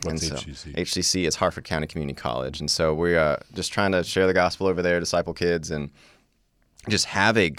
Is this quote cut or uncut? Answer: uncut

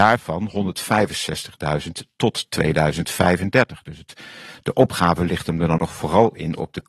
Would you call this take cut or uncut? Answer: cut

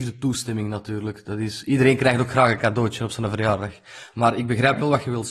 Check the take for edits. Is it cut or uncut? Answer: uncut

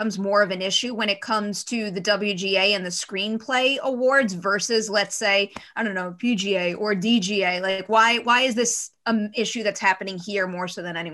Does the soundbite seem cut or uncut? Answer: uncut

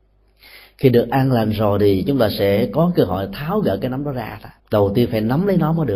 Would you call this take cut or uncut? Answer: cut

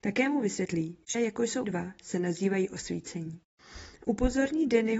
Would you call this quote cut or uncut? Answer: cut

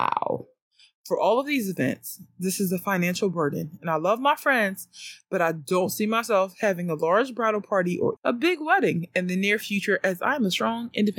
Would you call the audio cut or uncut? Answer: cut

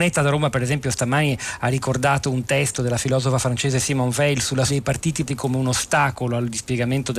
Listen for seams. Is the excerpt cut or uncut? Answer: cut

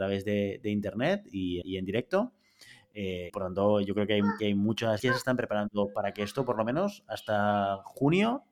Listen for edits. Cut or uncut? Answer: cut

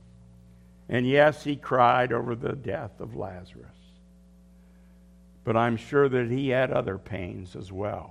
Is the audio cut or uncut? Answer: uncut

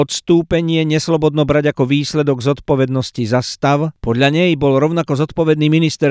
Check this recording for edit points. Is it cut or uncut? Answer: uncut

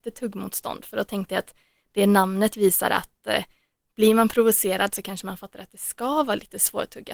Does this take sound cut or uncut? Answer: uncut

